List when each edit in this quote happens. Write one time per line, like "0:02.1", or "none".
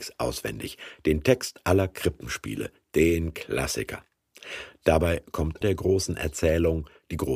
0:05.6